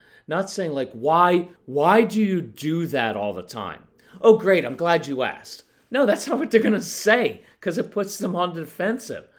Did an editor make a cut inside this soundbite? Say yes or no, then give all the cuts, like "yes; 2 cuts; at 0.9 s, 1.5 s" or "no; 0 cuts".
yes; 1 cut; at 1.6 s